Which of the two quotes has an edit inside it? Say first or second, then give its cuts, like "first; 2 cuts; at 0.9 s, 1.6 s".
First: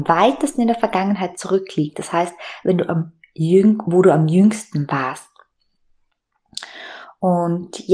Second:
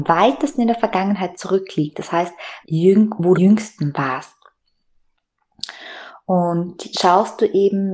second; 3 cuts; at 2.6 s, 3.3 s, 6.9 s